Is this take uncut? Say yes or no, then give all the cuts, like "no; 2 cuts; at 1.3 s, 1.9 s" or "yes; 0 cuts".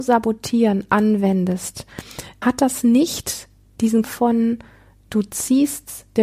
no; 2 cuts; at 2.4 s, 4.0 s